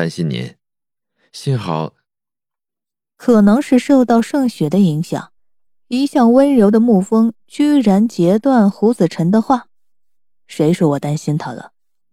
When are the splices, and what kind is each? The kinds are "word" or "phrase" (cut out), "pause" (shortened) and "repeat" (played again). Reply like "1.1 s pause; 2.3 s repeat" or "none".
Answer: none